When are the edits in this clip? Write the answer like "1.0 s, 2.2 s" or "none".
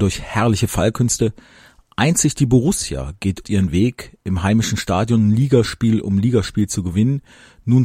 3.4 s